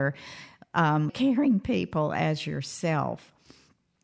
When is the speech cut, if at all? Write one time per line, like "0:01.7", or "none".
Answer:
0:01.1